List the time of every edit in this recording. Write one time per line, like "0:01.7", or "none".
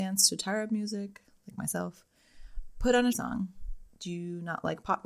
0:03.1